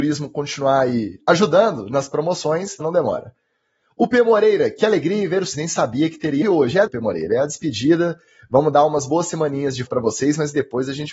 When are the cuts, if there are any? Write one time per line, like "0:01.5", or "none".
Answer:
0:02.8
0:05.5
0:06.4
0:06.9
0:09.9